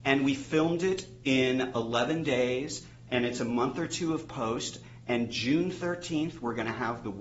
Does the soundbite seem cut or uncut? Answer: uncut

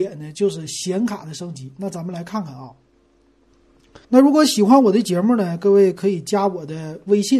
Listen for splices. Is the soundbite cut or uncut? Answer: cut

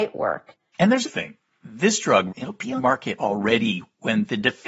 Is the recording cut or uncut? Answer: cut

